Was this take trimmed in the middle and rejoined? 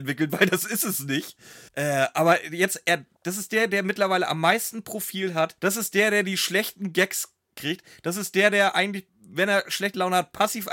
yes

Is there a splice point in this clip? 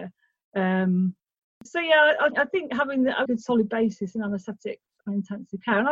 yes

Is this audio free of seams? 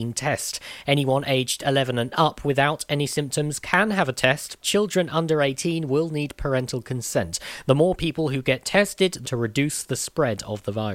no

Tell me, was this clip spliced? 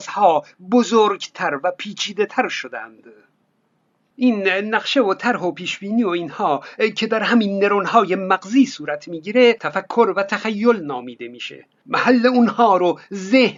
no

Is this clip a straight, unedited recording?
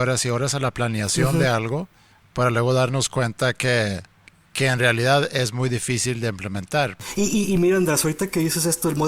yes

